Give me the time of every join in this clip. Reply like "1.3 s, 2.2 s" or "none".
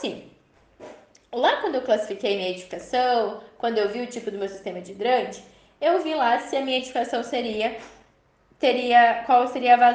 none